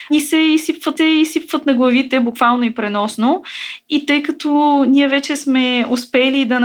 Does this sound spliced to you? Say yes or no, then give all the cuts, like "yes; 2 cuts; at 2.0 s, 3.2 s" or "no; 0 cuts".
yes; 1 cut; at 1.0 s